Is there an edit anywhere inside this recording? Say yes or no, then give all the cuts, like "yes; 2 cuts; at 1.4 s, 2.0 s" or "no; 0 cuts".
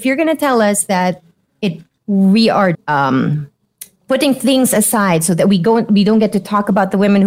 yes; 1 cut; at 2.7 s